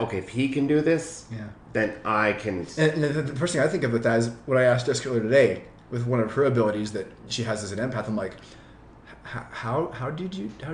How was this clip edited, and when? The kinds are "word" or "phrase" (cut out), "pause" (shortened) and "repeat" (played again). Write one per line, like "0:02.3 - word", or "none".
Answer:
none